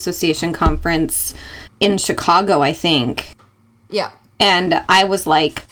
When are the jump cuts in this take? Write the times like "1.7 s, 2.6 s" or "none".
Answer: none